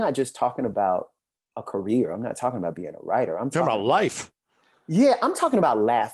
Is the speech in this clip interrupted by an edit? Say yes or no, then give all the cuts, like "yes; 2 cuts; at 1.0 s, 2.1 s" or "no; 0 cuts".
no; 0 cuts